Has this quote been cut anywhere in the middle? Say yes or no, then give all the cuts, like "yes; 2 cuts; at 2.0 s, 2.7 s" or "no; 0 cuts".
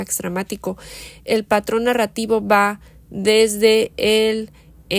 no; 0 cuts